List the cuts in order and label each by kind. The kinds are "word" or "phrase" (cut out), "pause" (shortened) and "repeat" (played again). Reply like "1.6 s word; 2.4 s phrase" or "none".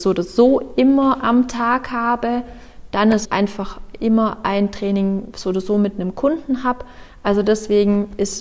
3.2 s phrase